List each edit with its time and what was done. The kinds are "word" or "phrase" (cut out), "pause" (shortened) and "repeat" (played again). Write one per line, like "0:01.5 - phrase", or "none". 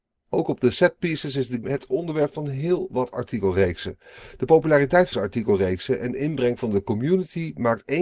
0:01.6 - word
0:05.1 - word